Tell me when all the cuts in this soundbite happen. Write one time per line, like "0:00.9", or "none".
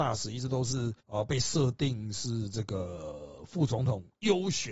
0:01.0